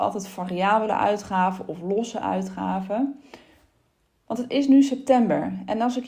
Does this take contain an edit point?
no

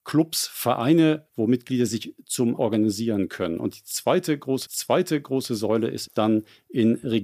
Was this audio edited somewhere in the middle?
yes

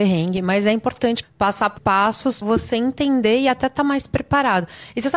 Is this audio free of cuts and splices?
no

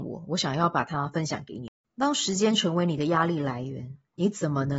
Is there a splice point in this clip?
no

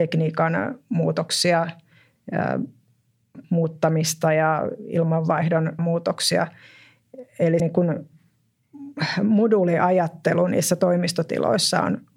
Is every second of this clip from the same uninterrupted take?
no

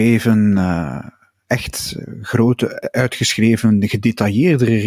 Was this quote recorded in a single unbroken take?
yes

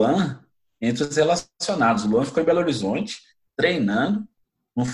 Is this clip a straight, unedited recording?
yes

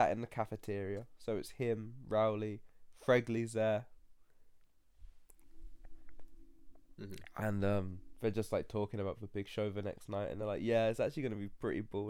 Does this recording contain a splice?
no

